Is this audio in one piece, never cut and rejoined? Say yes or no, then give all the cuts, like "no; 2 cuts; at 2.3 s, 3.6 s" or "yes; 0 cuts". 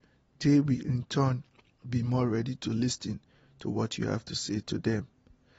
yes; 0 cuts